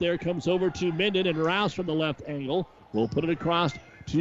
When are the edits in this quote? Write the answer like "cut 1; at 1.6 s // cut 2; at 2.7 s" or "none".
none